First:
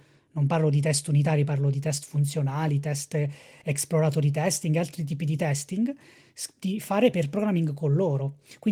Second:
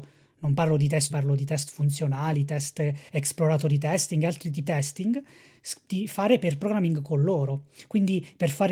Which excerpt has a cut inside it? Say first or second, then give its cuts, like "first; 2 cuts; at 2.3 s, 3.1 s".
second; 3 cuts; at 1.1 s, 3.1 s, 4.7 s